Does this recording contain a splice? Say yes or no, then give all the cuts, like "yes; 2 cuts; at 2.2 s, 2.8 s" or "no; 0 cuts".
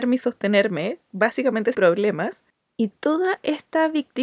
yes; 1 cut; at 1.7 s